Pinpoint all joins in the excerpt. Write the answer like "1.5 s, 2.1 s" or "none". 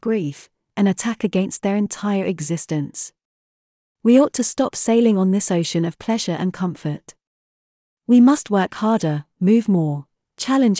none